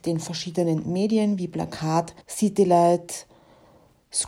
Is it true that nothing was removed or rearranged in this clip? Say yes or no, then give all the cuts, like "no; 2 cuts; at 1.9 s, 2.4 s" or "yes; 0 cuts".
no; 1 cut; at 2.2 s